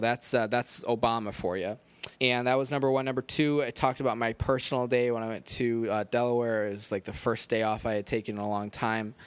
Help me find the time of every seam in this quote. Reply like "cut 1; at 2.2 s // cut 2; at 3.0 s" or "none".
cut 1; at 2.1 s